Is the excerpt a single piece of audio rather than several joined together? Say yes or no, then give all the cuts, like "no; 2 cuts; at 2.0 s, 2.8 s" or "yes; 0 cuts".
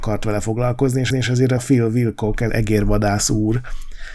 no; 3 cuts; at 1.1 s, 1.6 s, 2.5 s